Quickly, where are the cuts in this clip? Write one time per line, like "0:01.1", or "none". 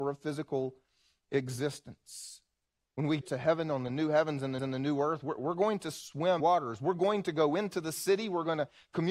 0:03.2
0:04.6
0:06.4